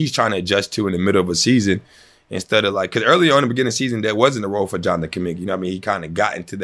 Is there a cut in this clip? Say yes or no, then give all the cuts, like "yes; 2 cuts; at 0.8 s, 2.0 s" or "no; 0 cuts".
no; 0 cuts